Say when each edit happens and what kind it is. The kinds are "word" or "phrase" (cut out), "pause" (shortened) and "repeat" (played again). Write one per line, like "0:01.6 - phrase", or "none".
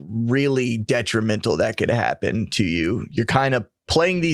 none